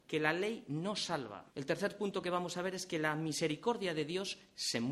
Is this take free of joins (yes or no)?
no